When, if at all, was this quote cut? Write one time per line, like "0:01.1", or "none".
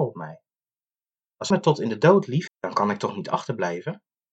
0:01.5
0:02.5

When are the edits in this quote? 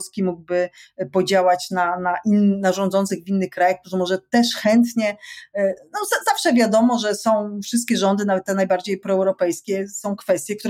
none

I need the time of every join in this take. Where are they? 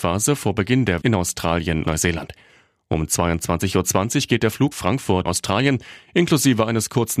0:01.0
0:01.8
0:04.7
0:05.3

